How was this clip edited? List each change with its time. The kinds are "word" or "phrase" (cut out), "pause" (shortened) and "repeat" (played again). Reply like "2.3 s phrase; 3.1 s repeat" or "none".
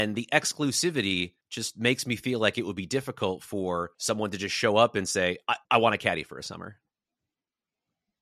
1.4 s pause; 3.9 s pause; 5.6 s pause

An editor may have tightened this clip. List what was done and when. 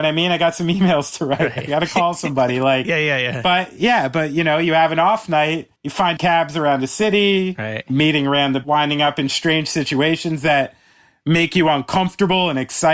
5.8 s pause; 6.2 s phrase; 8.6 s word

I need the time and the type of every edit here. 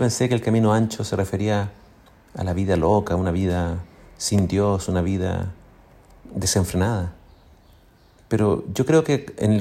none

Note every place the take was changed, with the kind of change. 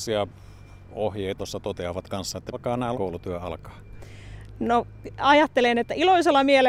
1.4 s phrase; 2.5 s word; 2.9 s phrase

